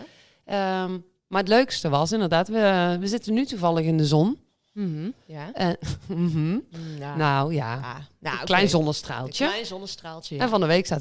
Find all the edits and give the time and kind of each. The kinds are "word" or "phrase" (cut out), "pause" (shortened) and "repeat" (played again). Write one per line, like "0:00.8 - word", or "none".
none